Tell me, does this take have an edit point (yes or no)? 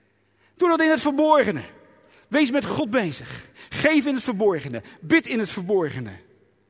no